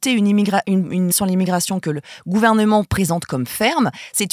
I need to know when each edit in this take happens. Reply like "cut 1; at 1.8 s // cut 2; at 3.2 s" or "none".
cut 1; at 1.1 s